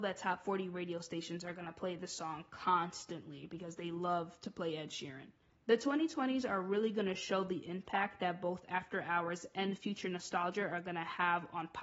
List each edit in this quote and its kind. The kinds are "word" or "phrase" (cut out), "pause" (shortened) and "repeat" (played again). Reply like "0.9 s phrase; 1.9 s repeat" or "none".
none